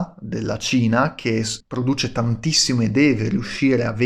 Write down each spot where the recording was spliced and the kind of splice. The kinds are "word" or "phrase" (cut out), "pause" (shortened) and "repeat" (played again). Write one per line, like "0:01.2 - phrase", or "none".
0:01.6 - pause